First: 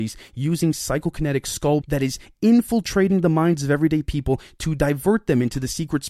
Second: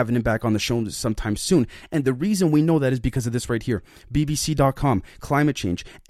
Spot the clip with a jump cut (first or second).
first